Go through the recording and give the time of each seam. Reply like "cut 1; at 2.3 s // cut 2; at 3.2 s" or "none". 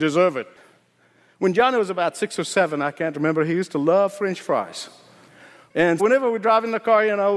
cut 1; at 6.0 s